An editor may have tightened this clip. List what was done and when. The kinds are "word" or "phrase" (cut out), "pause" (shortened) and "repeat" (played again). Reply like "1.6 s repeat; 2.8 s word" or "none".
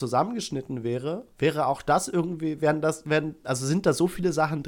1.3 s pause